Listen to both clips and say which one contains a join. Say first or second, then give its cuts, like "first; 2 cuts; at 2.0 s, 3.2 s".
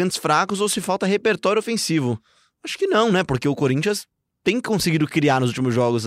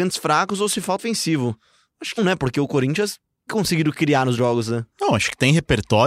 second; 4 cuts; at 1.0 s, 2.2 s, 3.5 s, 4.4 s